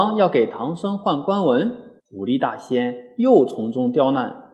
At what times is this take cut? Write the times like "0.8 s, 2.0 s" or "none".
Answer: 2.0 s